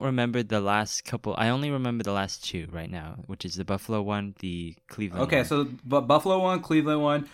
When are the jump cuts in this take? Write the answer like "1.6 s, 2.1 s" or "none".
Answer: none